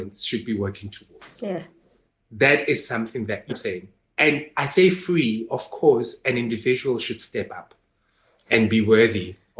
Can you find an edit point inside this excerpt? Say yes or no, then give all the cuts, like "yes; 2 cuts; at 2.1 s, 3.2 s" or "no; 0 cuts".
yes; 1 cut; at 3.5 s